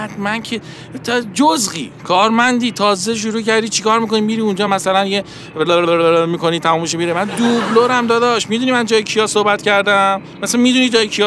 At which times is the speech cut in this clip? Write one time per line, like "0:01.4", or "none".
none